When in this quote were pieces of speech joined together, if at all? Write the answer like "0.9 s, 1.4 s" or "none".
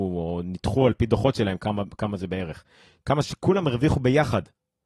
none